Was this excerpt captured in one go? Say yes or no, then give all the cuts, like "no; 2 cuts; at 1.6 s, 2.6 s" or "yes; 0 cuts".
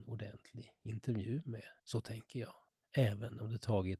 no; 1 cut; at 1.8 s